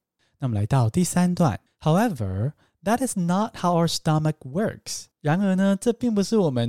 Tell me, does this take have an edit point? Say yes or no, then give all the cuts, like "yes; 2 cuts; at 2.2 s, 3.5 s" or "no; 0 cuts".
yes; 2 cuts; at 1.7 s, 5.1 s